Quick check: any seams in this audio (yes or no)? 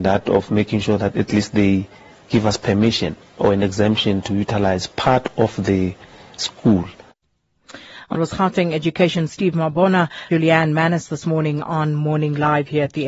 yes